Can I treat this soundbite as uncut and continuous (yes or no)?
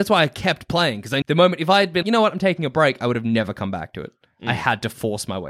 no